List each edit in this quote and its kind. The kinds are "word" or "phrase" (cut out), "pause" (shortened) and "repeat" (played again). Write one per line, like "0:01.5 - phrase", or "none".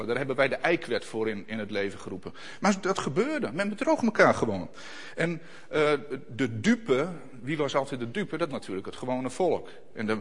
0:08.5 - phrase